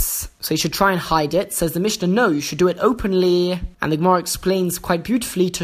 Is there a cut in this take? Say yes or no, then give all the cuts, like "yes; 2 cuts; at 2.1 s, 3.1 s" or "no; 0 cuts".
no; 0 cuts